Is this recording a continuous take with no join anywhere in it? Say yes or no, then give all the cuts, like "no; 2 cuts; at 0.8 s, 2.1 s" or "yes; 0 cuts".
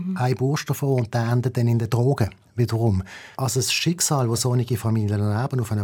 no; 1 cut; at 3.3 s